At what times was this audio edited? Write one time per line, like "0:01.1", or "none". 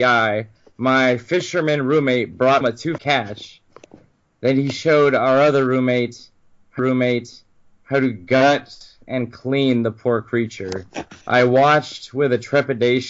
0:02.6
0:03.0
0:06.8
0:11.2